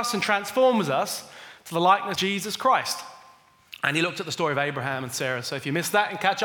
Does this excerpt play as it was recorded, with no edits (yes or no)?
no